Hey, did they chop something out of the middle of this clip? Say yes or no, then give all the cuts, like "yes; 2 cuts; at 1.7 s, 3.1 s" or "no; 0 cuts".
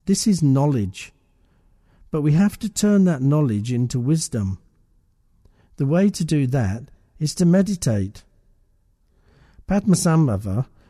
no; 0 cuts